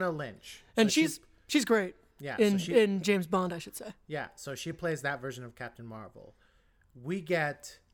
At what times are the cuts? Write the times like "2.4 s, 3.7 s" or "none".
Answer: none